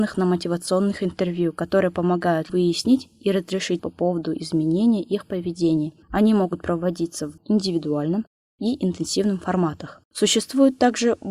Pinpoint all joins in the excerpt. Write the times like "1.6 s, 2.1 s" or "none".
2.5 s, 3.8 s, 6.0 s, 7.4 s, 10.0 s